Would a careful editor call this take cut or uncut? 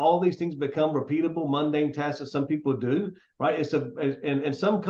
uncut